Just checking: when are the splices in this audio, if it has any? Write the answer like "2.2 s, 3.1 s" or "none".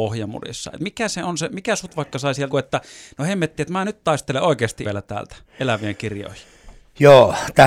2.5 s, 4.8 s